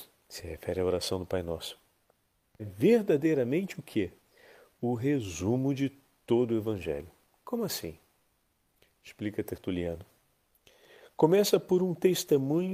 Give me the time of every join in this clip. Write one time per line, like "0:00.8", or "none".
0:02.6